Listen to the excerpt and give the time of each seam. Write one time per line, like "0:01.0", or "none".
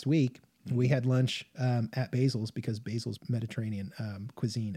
0:03.2